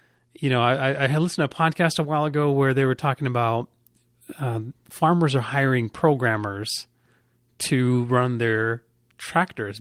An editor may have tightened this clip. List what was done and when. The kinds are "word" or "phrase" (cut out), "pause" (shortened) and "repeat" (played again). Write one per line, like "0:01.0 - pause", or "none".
none